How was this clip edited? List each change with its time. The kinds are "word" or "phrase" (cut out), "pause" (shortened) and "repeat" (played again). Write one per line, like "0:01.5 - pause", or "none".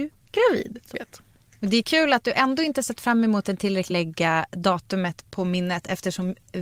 0:00.9 - word
0:03.9 - phrase